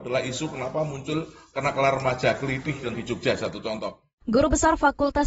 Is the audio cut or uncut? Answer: cut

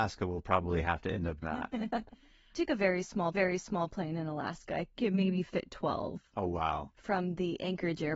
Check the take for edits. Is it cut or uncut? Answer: cut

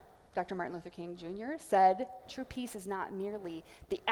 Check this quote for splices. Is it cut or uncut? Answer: uncut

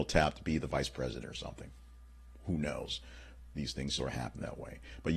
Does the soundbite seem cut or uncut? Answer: cut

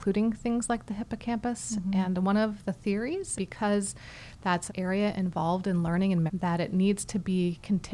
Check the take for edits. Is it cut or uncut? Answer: cut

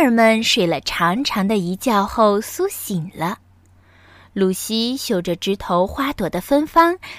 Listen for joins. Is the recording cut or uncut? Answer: uncut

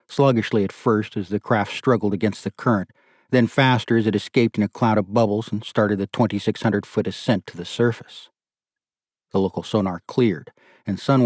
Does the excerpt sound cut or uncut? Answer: uncut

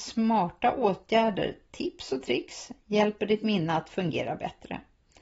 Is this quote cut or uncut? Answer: uncut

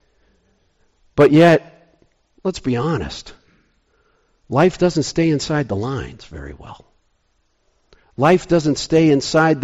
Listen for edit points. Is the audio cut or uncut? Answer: uncut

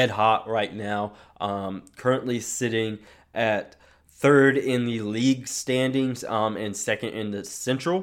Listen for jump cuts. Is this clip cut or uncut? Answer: uncut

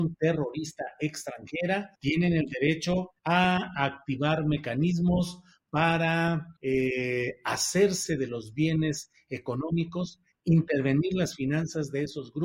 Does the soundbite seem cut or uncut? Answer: cut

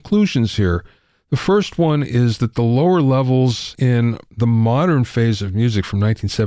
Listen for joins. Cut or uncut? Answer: uncut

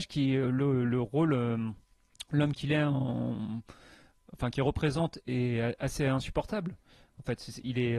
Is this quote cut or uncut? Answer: uncut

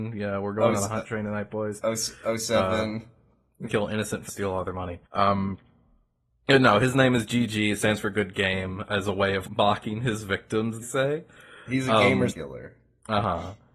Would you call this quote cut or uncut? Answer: cut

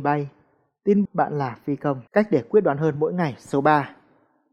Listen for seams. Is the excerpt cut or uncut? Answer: cut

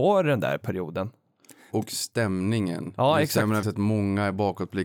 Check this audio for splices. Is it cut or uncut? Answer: cut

